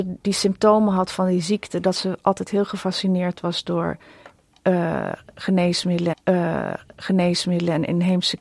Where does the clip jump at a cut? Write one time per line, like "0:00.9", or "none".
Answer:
0:06.1